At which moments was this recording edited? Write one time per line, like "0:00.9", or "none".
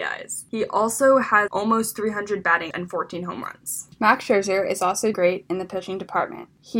0:01.5
0:02.7
0:05.1